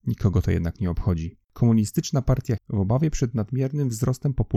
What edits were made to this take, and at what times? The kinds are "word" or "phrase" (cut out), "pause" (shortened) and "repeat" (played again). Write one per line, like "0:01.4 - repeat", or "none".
0:01.4 - pause
0:02.6 - word